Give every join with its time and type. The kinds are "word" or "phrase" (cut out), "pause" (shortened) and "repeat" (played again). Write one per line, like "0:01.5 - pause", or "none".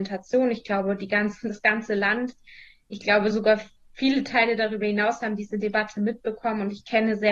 none